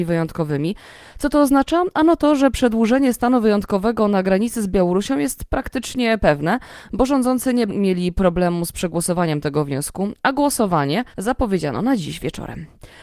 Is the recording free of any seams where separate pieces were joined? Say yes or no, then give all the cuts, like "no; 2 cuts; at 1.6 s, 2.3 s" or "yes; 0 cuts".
no; 2 cuts; at 7.7 s, 11.1 s